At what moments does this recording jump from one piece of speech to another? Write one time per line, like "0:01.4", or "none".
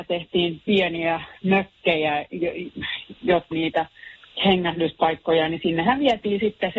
0:03.5